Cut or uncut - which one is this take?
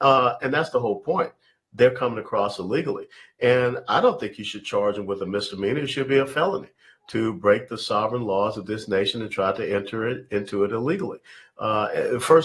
uncut